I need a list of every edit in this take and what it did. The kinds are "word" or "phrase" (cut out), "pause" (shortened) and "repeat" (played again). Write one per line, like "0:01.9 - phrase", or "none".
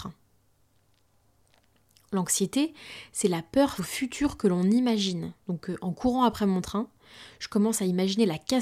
0:03.8 - word
0:05.4 - pause